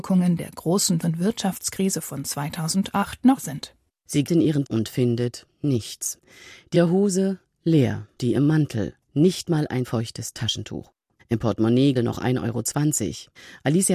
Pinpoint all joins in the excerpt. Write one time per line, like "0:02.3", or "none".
0:01.0
0:03.4
0:04.3
0:04.6
0:06.7
0:08.2
0:09.8
0:12.0